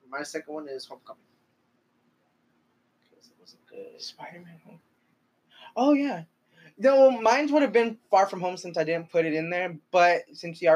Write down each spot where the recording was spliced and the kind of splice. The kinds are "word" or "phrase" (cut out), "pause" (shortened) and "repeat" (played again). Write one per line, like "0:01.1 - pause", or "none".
none

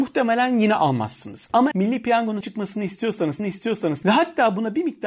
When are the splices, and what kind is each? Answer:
0:01.7 - word
0:02.4 - word
0:03.4 - repeat

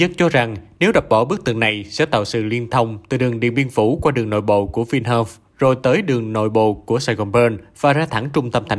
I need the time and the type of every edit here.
none

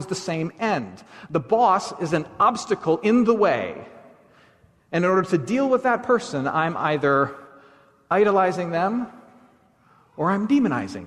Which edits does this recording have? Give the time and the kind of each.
none

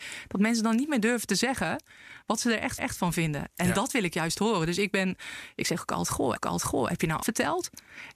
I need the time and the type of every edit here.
0:02.8 - repeat
0:06.4 - repeat
0:07.2 - word

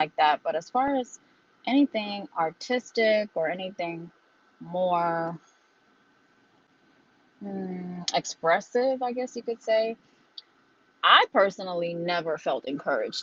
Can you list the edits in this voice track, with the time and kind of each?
none

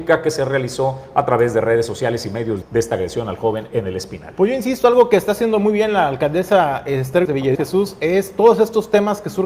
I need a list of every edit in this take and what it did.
0:02.6 - word
0:07.2 - word
0:07.5 - word

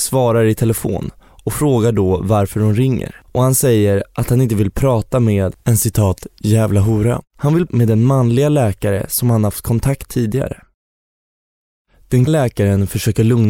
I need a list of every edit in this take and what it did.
0:03.2 - pause
0:05.6 - pause
0:07.3 - pause
0:07.7 - word
0:10.1 - word
0:12.3 - word

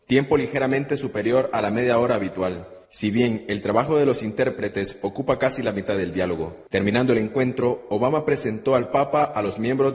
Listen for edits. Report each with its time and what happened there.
0:02.9 - pause
0:06.7 - pause

